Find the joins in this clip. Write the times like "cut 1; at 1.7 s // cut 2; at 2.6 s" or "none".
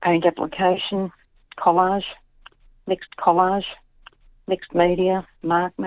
cut 1; at 3.1 s

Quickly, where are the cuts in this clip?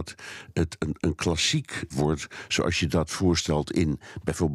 cut 1; at 1.9 s

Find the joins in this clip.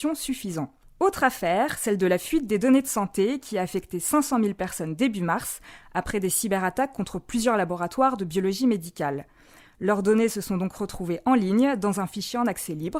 none

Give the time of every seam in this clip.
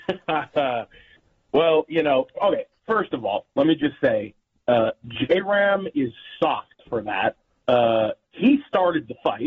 none

